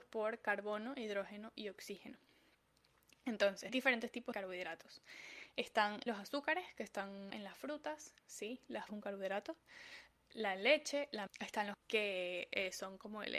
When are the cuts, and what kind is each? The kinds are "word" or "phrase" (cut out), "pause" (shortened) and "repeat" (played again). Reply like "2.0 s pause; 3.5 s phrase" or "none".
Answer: 3.7 s word; 4.3 s word; 6.1 s word; 7.3 s phrase; 8.2 s pause; 8.9 s word; 11.3 s word; 11.7 s word